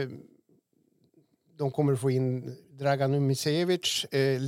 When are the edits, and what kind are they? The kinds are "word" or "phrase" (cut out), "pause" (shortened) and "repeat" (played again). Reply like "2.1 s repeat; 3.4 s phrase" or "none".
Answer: 2.6 s pause